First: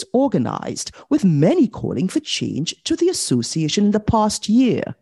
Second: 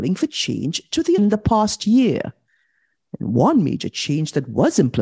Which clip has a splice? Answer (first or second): second